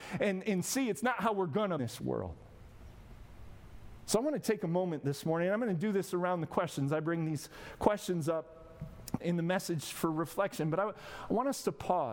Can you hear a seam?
yes; 2 cuts; at 1.8 s, 9.2 s

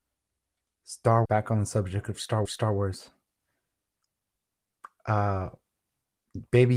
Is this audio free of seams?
no; 2 cuts; at 1.3 s, 2.5 s

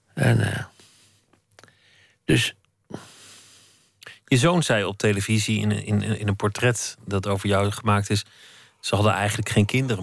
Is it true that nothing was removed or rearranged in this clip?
yes; 0 cuts

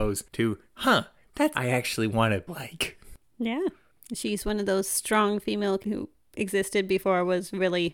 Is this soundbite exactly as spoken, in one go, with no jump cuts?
no; 3 cuts; at 1.5 s, 2.5 s, 5.8 s

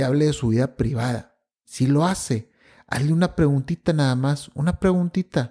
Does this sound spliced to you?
no; 0 cuts

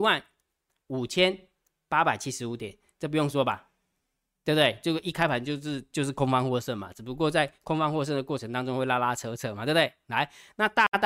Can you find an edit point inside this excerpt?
no; 0 cuts

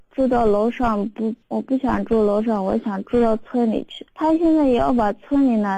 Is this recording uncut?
no; 2 cuts; at 1.4 s, 4.1 s

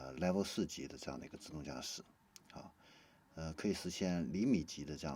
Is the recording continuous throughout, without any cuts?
yes; 0 cuts

